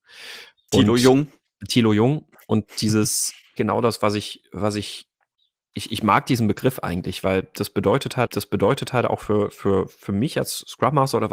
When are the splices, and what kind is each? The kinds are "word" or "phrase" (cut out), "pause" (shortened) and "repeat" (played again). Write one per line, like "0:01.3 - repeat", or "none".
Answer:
0:03.6 - phrase
0:08.3 - repeat

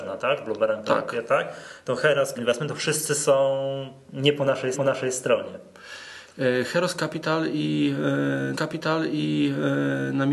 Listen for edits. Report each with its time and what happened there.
0:02.4 - phrase
0:04.7 - repeat
0:08.5 - repeat

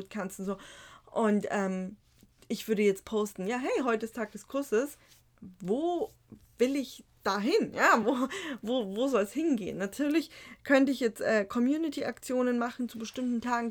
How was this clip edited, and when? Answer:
none

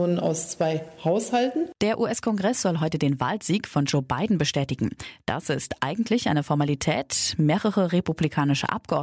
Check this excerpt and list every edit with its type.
0:01.8 - pause

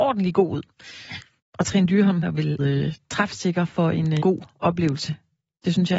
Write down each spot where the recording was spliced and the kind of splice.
0:01.4 - pause
0:02.2 - word
0:02.6 - word
0:04.2 - word

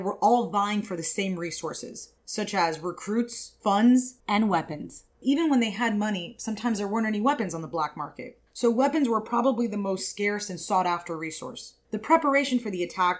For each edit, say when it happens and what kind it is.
0:02.2 - pause
0:04.2 - pause
0:05.1 - pause
0:08.5 - pause

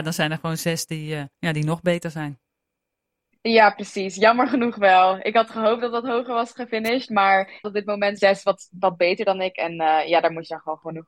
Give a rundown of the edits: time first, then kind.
0:01.3 - pause
0:07.6 - word
0:08.2 - phrase

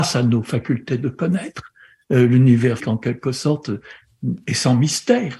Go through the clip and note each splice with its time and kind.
0:02.8 - word

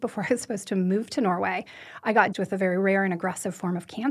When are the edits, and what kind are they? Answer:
0:02.3 - word

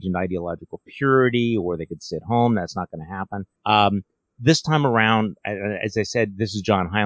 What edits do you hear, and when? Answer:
0:03.6 - pause

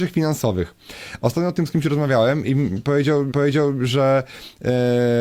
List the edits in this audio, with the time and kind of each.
0:02.4 - word
0:03.3 - repeat

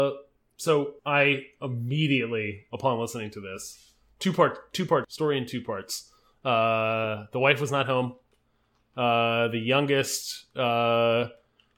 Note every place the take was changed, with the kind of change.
0:01.0 - pause
0:05.0 - word

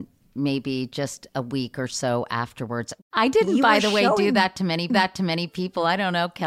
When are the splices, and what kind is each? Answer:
0:04.9 - repeat

